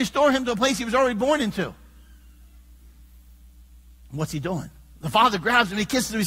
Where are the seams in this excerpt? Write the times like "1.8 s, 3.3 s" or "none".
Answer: none